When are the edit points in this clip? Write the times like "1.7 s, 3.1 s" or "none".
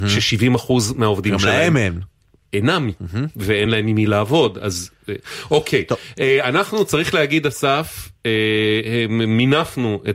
none